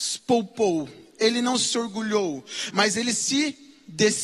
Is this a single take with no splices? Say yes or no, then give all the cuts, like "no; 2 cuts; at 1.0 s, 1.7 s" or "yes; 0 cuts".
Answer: yes; 0 cuts